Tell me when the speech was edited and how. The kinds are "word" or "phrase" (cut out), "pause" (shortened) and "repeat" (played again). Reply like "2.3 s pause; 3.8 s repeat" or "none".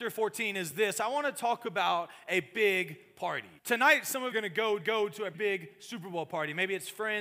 3.6 s pause; 4.3 s phrase; 4.8 s repeat; 5.3 s word